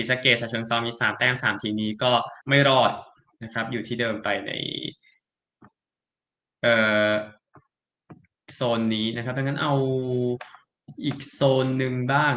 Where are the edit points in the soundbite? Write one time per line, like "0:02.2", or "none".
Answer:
0:02.4